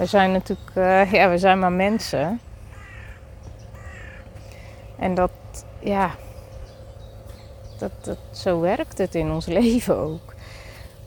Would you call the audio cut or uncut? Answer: uncut